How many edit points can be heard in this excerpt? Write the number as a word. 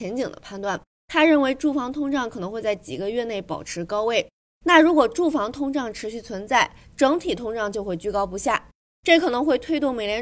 zero